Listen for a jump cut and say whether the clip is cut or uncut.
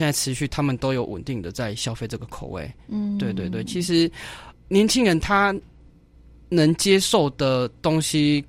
cut